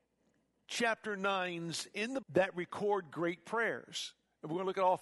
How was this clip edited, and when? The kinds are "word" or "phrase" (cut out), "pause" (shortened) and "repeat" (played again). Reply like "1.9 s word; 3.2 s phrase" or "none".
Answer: 2.2 s word